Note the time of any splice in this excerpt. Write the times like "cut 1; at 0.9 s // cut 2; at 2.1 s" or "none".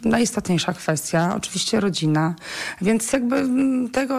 none